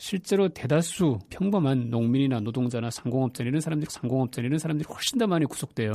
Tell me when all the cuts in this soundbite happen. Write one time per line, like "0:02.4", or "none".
0:01.3
0:03.9